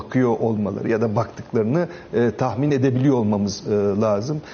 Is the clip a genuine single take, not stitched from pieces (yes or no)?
yes